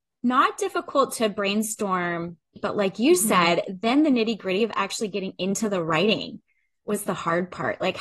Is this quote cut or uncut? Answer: cut